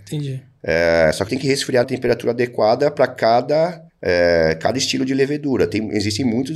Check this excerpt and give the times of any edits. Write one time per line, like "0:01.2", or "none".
0:01.3
0:01.8
0:03.9